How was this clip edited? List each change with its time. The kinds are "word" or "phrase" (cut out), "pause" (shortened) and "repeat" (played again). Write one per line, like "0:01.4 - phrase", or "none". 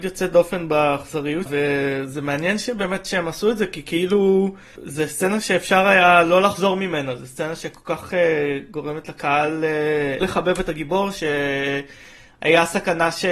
0:01.5 - word
0:10.2 - word